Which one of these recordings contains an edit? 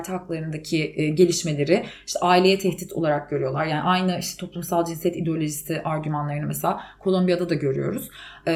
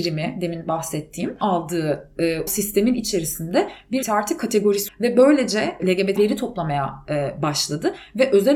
second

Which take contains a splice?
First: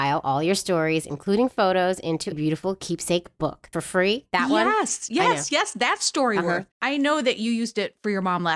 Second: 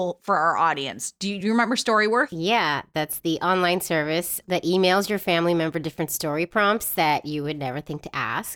first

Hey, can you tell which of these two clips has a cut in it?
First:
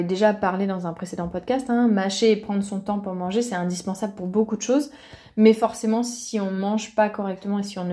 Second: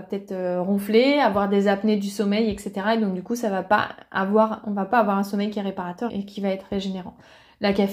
second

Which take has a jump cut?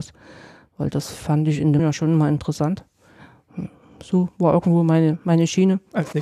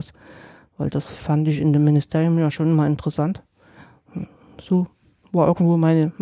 first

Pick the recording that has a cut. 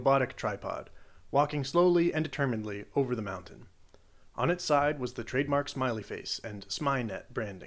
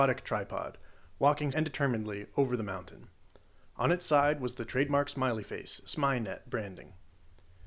second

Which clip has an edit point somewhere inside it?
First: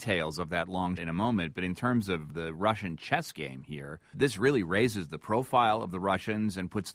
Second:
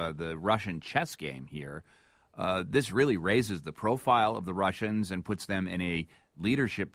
first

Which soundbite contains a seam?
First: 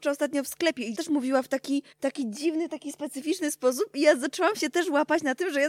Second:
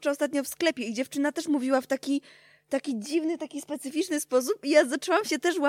first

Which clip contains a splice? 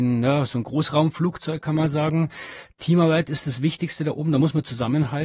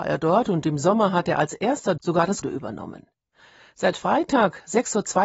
second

